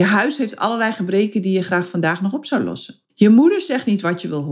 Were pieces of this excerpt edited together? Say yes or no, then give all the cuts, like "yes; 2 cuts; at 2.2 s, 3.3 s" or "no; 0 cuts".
yes; 1 cut; at 3.1 s